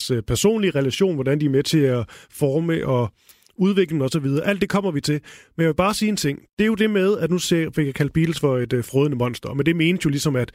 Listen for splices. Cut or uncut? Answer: uncut